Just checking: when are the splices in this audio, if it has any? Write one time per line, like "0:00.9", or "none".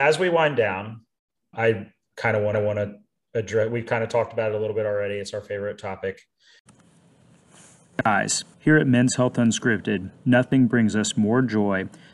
0:01.5
0:02.5
0:08.5